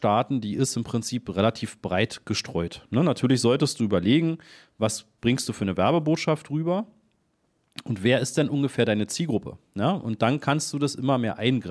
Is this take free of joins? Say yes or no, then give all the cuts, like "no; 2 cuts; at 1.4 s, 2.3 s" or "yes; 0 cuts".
yes; 0 cuts